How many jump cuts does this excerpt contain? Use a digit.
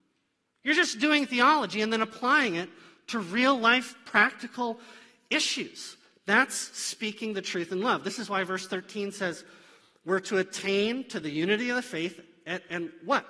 0